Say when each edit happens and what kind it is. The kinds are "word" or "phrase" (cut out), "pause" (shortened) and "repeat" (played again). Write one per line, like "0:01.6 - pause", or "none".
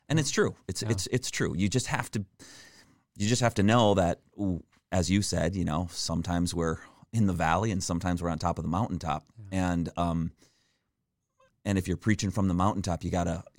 none